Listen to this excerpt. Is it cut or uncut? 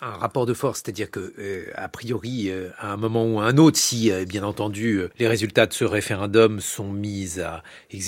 cut